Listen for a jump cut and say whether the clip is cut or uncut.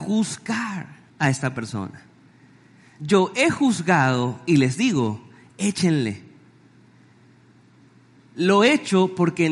cut